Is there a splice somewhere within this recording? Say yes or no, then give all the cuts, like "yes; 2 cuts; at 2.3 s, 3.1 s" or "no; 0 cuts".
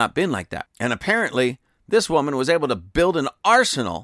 no; 0 cuts